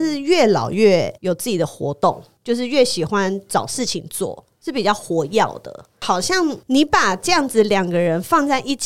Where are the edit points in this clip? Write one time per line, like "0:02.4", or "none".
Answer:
0:01.2